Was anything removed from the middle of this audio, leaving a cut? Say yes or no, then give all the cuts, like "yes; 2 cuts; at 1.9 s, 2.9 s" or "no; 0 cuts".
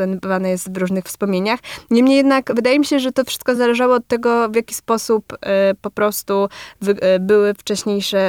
no; 0 cuts